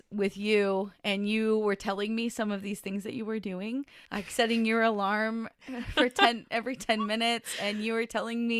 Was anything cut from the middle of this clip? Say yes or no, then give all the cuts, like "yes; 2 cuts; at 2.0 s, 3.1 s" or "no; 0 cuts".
yes; 1 cut; at 4.0 s